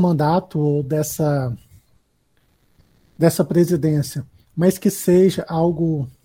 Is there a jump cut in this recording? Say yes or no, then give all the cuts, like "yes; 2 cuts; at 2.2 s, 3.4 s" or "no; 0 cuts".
no; 0 cuts